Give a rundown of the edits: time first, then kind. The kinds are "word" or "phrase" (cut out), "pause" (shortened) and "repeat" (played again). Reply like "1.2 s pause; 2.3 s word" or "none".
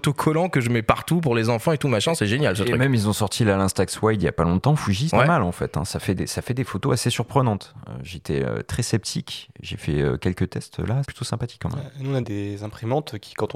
5.1 s word; 11.0 s word; 12.2 s word

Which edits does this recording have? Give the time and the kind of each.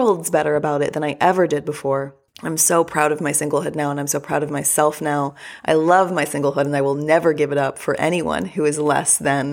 2.3 s pause

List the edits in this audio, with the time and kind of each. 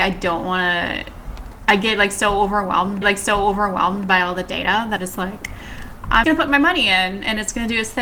3.0 s repeat; 5.0 s word; 6.2 s word

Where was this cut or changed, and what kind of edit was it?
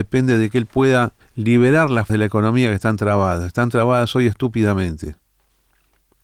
1.2 s pause; 2.1 s word

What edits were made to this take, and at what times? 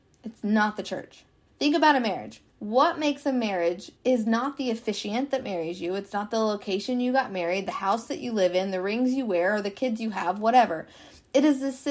1.5 s pause; 2.5 s pause; 4.0 s pause

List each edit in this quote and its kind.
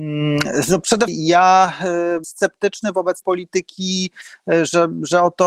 1.1 s word; 2.2 s word; 3.2 s word

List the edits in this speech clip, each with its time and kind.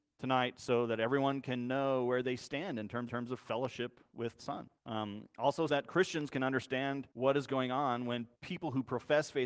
3.1 s repeat; 4.4 s phrase; 4.8 s pause; 5.7 s word; 7.1 s pause; 8.3 s pause

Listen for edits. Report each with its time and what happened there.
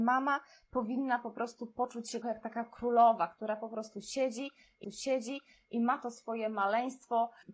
2.2 s word; 4.8 s repeat

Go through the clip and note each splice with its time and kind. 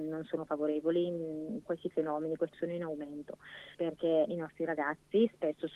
1.6 s word; 2.5 s word; 3.7 s word; 4.3 s word

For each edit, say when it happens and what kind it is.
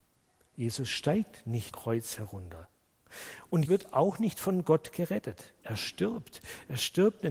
1.7 s word; 3.7 s word; 5.6 s pause

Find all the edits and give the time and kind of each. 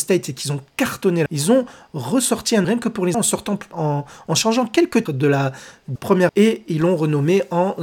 1.3 s word; 2.6 s word; 3.1 s word; 3.7 s word; 5.1 s word; 6.0 s word; 6.3 s word

